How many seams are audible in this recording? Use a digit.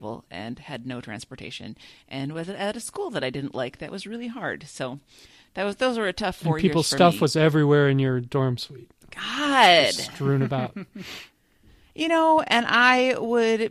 0